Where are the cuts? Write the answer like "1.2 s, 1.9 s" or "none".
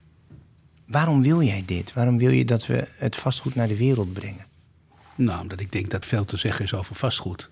6.0 s